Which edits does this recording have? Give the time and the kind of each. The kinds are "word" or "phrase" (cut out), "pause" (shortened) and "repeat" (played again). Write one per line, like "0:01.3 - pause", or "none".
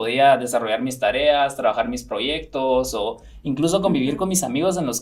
none

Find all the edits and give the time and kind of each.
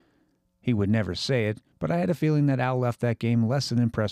none

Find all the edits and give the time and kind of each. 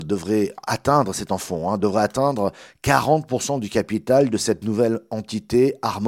none

